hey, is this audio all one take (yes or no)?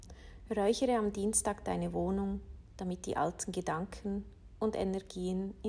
yes